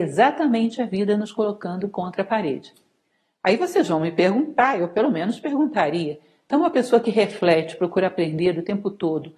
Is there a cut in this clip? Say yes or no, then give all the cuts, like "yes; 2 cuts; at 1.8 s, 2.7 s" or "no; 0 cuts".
no; 0 cuts